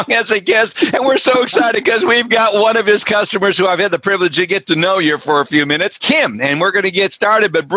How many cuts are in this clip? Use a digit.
1